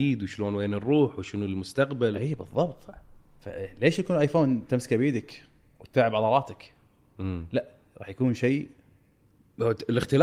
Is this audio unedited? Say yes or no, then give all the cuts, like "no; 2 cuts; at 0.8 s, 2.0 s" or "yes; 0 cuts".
yes; 0 cuts